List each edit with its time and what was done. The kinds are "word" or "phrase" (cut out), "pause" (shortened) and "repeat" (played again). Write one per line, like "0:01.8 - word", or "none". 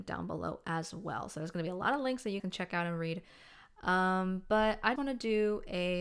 0:02.4 - word
0:05.0 - word